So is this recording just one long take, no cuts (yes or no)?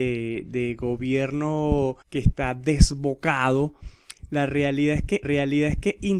no